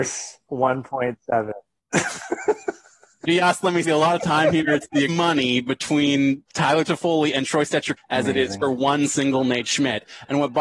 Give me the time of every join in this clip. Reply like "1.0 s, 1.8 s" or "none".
3.8 s, 5.1 s, 8.0 s